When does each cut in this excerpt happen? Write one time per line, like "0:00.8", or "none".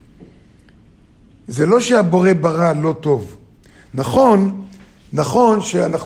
none

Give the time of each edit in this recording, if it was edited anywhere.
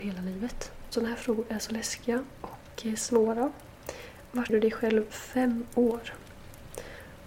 0:04.5
0:05.1

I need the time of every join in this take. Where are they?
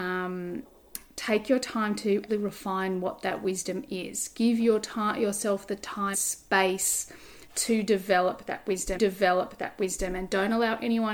0:02.3
0:06.1
0:09.0

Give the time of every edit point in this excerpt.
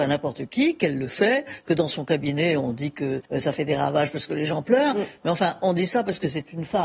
0:03.3

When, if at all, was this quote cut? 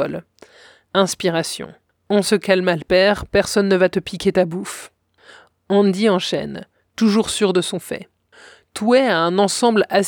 none

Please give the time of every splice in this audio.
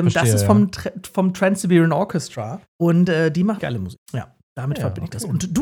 0:02.7
0:03.6
0:04.0

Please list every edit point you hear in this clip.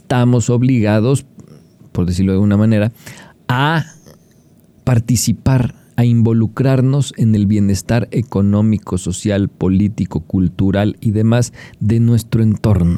none

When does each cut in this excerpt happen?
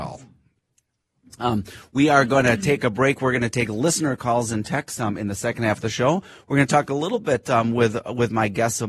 none

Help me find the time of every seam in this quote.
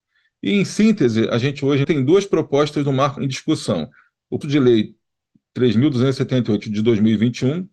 0:01.8
0:03.2
0:04.4

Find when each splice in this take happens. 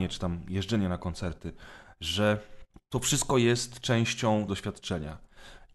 0:02.7
0:04.5

